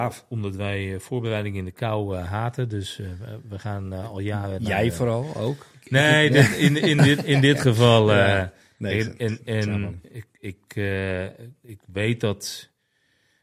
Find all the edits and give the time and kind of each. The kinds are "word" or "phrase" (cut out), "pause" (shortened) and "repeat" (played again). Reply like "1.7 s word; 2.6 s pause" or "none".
none